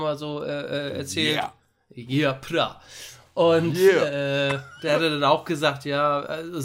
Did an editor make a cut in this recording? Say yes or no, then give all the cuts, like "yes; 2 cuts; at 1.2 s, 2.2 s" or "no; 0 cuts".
no; 0 cuts